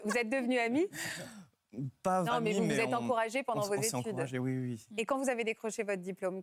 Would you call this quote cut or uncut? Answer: cut